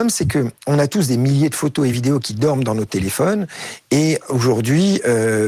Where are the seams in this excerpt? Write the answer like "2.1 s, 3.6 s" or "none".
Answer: none